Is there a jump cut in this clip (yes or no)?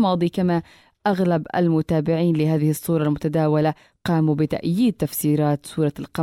no